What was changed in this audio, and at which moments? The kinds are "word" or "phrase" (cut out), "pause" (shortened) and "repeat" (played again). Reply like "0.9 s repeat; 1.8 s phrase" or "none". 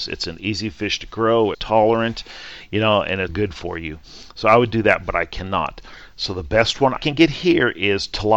1.5 s word; 3.3 s word; 7.0 s word